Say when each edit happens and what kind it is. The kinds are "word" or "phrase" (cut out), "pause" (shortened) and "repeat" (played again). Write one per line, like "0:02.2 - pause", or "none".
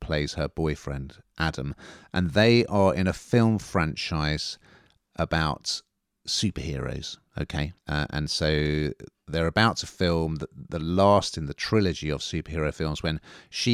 0:07.8 - pause